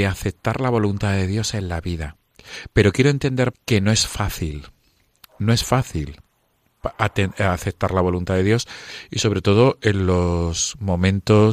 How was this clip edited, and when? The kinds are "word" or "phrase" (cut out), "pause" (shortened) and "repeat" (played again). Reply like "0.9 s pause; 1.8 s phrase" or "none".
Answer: 3.5 s word